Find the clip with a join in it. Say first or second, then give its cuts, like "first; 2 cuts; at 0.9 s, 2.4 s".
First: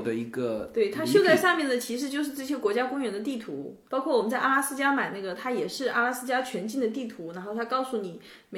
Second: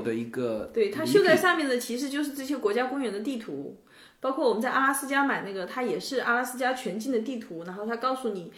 first; 1 cut; at 3.9 s